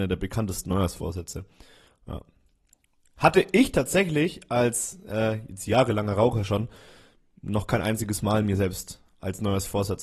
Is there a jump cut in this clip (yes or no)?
no